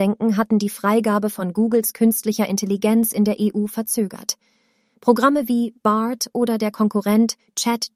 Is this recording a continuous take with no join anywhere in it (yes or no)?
yes